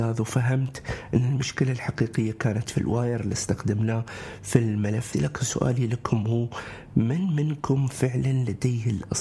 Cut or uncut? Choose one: cut